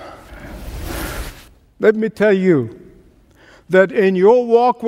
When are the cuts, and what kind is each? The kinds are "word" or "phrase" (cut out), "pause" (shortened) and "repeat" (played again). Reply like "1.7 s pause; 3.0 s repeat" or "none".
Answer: none

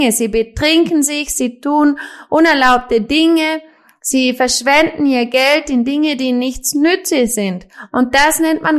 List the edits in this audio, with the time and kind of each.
none

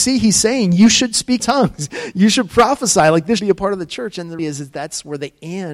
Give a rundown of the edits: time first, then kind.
1.4 s word; 3.4 s word; 4.4 s word

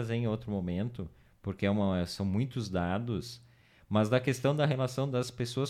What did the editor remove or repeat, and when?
none

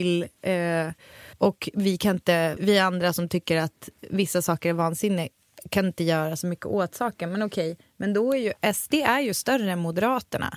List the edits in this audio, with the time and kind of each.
1.3 s pause; 2.6 s word

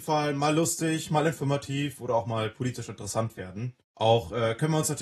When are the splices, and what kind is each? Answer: 3.8 s pause

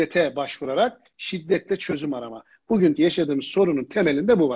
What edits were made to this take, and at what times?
2.9 s word

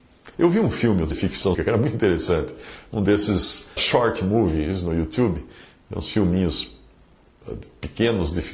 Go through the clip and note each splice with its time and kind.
1.1 s word; 1.5 s word; 3.8 s word

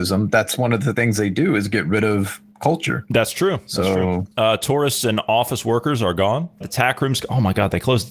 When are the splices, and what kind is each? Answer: 3.1 s word; 4.3 s pause; 6.6 s word

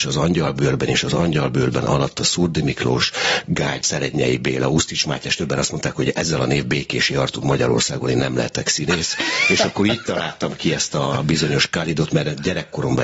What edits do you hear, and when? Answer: 3.8 s word; 6.6 s word

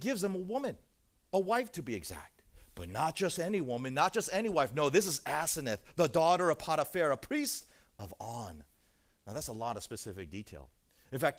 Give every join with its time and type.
none

